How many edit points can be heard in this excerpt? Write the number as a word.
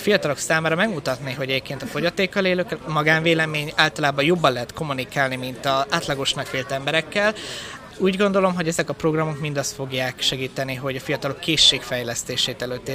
one